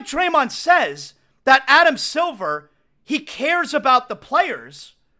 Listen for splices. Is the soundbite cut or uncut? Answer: uncut